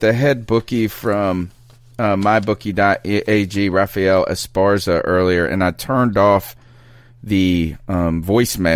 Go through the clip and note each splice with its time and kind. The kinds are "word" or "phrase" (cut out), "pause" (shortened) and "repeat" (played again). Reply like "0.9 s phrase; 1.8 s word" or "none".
none

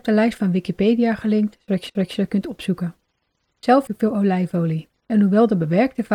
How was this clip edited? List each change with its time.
1.9 s repeat; 3.9 s word; 5.0 s pause

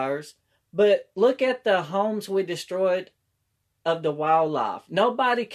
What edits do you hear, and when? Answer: none

